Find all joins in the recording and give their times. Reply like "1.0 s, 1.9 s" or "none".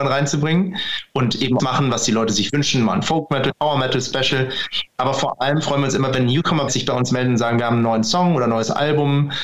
1.6 s, 3.5 s, 6.7 s